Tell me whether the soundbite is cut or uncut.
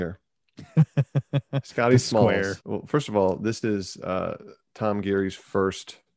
cut